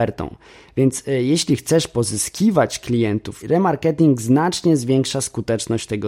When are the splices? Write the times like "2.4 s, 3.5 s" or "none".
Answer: 3.4 s